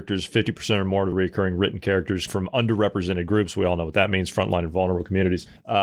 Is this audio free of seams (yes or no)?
no